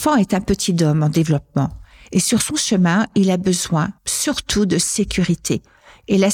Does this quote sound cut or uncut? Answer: cut